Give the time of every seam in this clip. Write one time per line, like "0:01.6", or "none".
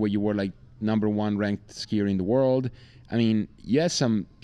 none